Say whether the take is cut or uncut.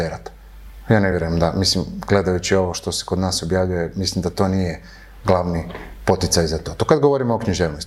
uncut